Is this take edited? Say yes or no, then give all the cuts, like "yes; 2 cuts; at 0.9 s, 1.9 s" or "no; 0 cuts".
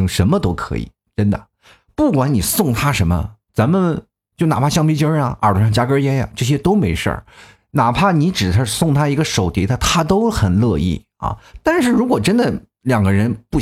no; 0 cuts